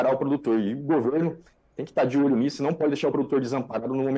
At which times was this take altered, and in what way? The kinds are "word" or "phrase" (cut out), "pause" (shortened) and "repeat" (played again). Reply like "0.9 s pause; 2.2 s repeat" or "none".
none